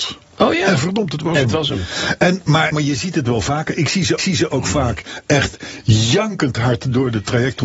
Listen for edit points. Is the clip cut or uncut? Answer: cut